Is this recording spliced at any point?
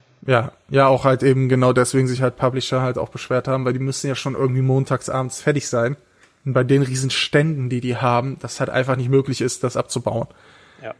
no; 0 cuts

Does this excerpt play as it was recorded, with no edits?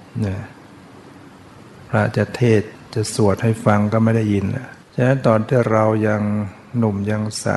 no; 1 cut; at 4.8 s

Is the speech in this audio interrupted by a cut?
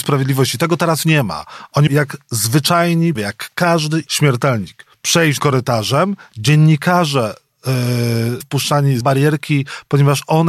yes; 7 cuts; at 1.0 s, 1.9 s, 3.2 s, 4.1 s, 5.4 s, 8.4 s, 9.0 s

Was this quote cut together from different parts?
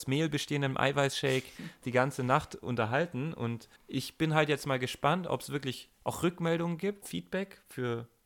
yes; 4 cuts; at 1.8 s, 3.8 s, 5.9 s, 7.0 s

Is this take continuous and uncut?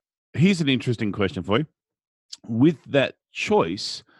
yes; 0 cuts

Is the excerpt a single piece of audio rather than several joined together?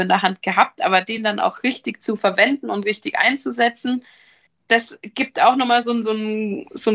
yes; 0 cuts

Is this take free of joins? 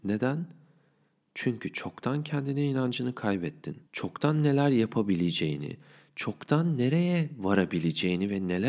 no; 1 cut; at 3.9 s

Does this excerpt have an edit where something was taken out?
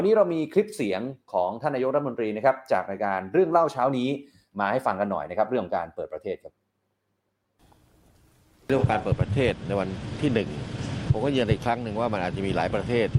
no; 0 cuts

